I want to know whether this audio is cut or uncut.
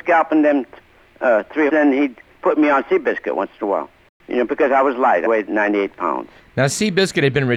cut